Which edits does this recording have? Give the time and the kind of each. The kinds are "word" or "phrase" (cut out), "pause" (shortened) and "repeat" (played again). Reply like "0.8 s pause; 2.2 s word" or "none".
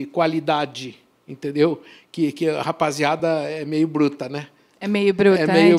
none

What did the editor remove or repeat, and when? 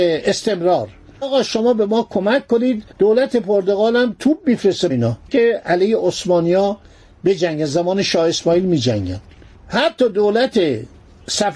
1.2 s word; 2.9 s pause; 4.9 s word; 5.3 s phrase

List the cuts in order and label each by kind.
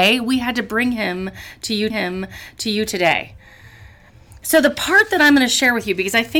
1.9 s repeat

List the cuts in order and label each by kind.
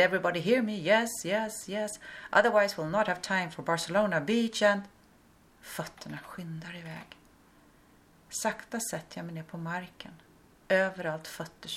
none

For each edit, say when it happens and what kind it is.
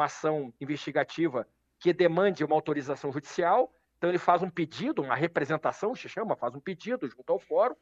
none

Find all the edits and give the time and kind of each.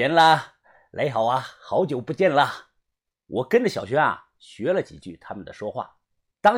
none

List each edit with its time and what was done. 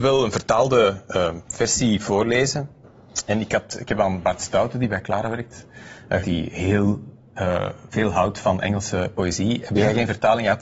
6.2 s phrase

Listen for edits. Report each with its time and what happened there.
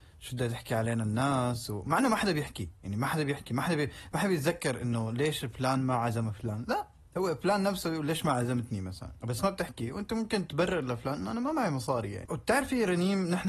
9.4 s phrase

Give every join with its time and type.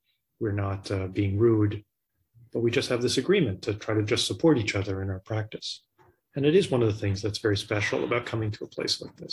none

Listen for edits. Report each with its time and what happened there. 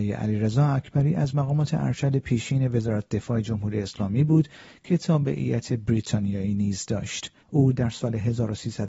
7.4 s pause

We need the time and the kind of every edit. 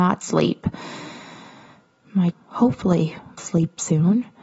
2.3 s word; 3.4 s word

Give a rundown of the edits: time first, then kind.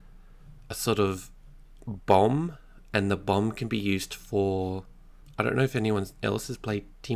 none

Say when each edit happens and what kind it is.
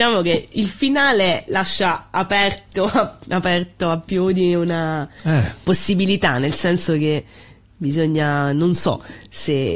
none

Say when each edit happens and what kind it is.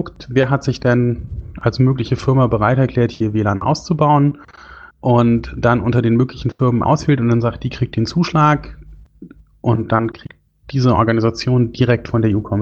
4.9 s pause; 6.8 s word

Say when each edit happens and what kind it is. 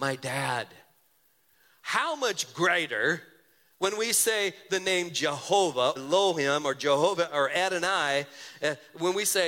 6.0 s word

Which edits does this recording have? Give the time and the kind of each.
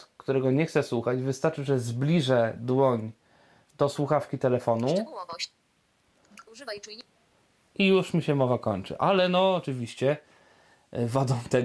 none

